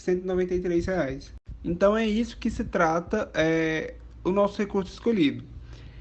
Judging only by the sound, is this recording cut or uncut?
uncut